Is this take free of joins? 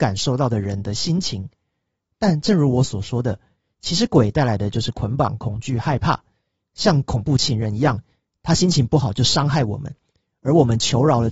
yes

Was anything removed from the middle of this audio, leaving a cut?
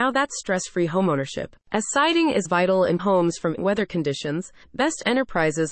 yes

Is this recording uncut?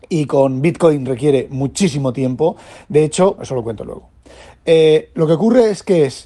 no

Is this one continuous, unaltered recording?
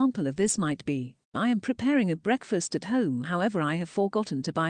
no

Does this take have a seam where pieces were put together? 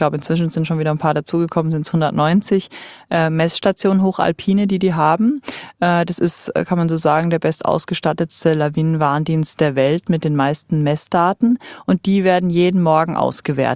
no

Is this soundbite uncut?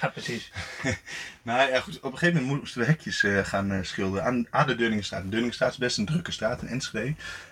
yes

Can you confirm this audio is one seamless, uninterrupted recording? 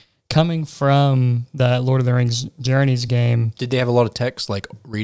yes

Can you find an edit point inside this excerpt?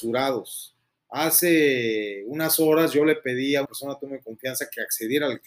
yes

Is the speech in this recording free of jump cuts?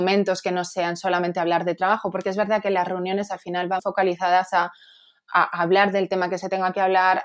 no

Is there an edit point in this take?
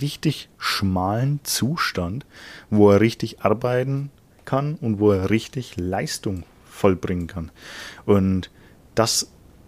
no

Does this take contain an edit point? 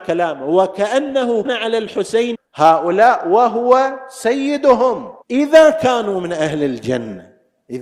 yes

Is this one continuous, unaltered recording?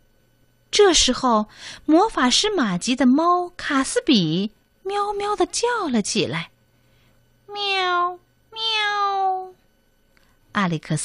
yes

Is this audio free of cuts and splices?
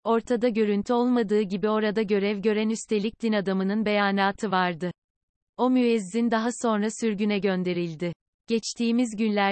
yes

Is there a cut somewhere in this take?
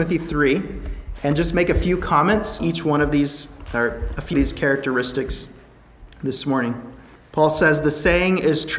yes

